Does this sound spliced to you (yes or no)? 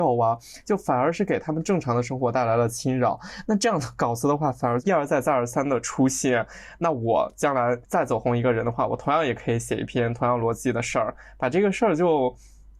yes